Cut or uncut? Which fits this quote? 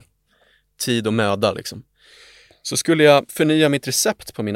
uncut